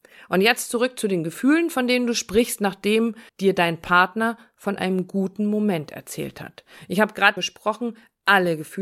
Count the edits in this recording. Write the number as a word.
two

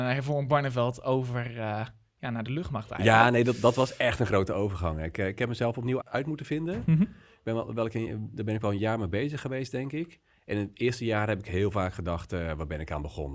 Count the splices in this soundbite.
one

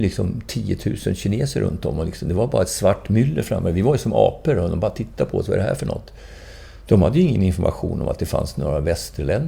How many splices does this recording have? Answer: zero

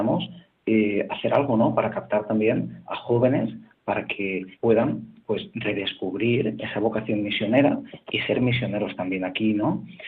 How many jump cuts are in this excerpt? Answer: two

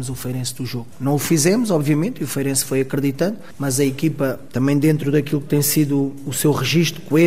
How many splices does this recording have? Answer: zero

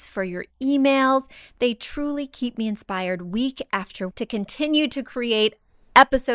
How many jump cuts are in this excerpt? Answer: one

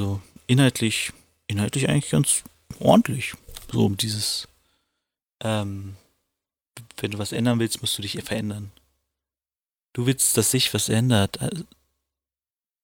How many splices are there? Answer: zero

